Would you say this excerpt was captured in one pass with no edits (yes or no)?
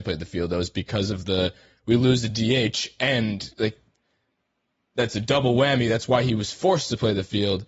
yes